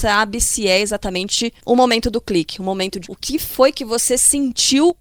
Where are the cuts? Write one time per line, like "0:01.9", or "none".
0:03.0